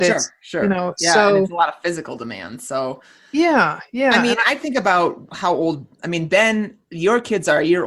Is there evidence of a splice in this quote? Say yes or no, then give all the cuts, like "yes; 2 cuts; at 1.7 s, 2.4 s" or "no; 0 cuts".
no; 0 cuts